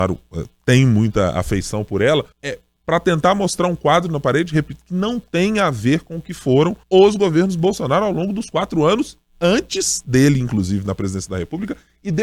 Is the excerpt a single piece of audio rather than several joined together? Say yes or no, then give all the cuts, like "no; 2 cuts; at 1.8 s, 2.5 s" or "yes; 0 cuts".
no; 2 cuts; at 2.3 s, 6.8 s